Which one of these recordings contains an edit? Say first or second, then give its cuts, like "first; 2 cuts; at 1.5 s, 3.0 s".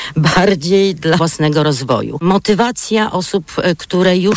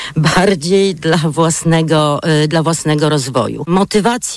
first; 1 cut; at 1.2 s